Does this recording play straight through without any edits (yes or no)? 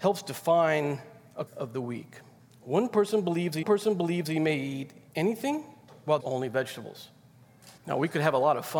no